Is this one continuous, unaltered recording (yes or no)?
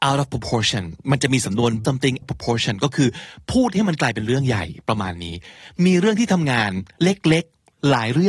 no